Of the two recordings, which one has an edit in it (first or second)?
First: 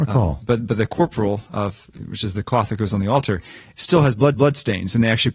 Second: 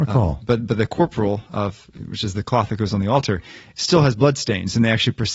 first